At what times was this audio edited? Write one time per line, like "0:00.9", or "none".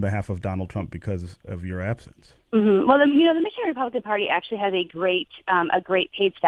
none